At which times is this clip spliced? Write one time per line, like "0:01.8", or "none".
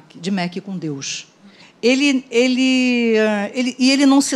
0:01.6